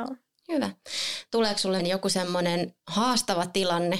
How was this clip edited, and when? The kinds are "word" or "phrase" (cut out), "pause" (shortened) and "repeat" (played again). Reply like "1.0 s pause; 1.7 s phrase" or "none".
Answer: 1.8 s word; 2.8 s pause